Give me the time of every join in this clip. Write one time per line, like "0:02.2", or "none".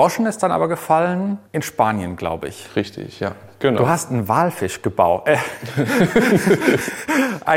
0:01.5